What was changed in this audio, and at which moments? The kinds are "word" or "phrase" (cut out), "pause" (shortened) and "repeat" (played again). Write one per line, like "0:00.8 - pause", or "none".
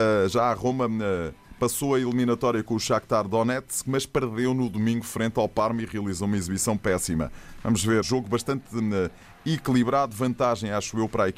0:08.0 - word